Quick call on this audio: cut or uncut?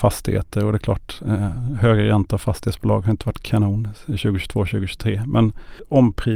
uncut